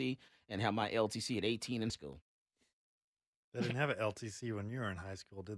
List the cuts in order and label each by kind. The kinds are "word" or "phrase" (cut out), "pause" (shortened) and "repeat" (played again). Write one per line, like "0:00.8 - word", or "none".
0:01.9 - word